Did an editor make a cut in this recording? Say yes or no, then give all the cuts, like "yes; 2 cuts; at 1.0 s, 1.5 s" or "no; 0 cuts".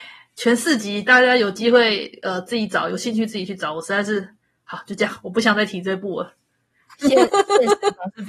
no; 0 cuts